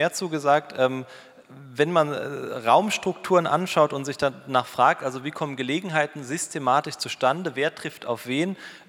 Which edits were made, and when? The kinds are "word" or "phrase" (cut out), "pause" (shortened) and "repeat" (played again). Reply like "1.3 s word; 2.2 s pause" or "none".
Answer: none